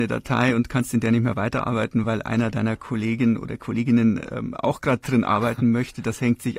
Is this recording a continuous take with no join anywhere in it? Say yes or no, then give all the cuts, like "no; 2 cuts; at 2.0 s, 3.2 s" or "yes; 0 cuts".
yes; 0 cuts